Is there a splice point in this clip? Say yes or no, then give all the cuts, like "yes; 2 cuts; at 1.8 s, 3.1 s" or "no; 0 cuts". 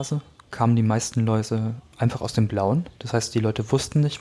yes; 1 cut; at 3.0 s